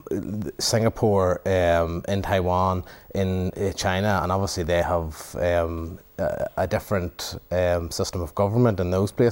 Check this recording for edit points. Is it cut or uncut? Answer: uncut